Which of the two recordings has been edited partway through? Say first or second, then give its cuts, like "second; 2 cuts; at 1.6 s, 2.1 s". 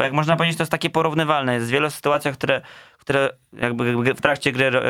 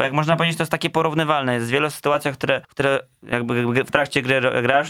second; 1 cut; at 2.6 s